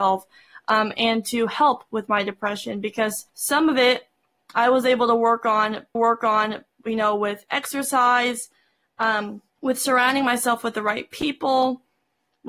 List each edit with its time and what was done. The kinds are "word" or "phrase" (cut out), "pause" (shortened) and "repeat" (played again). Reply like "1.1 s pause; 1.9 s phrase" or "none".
3.3 s pause; 6.0 s repeat; 9.5 s pause